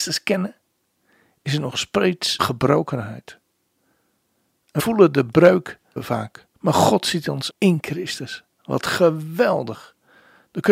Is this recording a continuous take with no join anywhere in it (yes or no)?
no